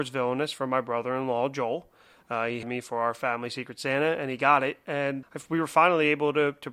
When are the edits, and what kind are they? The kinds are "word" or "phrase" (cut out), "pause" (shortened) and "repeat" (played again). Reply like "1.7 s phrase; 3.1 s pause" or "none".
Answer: 2.6 s word; 5.2 s word